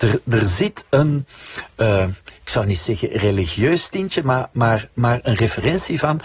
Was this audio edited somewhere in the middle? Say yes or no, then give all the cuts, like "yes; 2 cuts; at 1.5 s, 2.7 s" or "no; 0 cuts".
yes; 1 cut; at 4.5 s